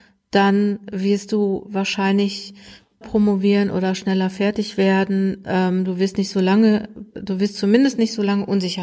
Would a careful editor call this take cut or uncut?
cut